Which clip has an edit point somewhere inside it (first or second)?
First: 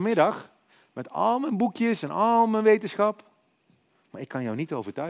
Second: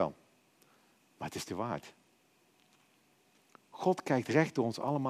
second